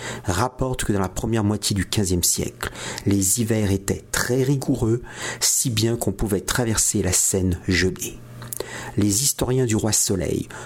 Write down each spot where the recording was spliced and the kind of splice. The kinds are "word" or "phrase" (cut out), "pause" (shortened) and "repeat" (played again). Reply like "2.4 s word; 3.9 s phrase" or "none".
none